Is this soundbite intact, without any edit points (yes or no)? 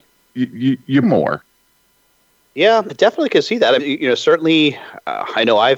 no